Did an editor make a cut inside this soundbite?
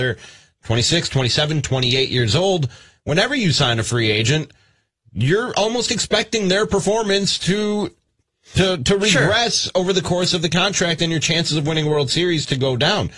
no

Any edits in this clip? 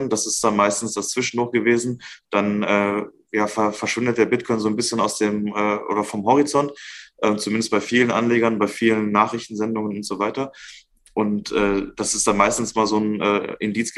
no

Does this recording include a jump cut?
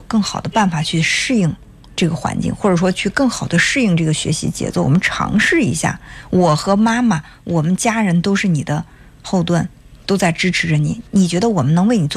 no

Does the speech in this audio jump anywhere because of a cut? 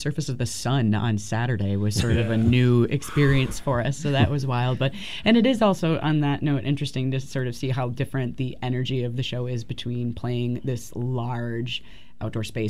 no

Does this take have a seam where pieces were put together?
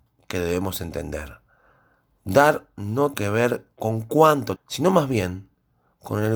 yes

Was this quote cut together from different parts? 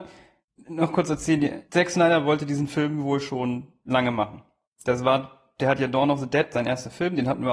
yes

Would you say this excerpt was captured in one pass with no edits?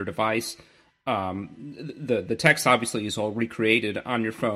yes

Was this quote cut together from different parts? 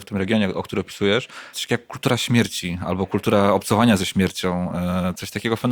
yes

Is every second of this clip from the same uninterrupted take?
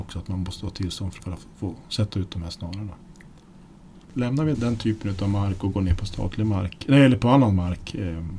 no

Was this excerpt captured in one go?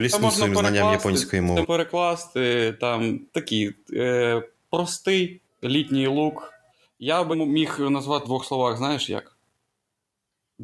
no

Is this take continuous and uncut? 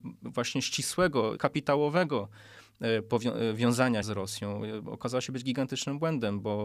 no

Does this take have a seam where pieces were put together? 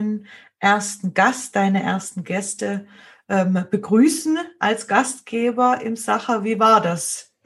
no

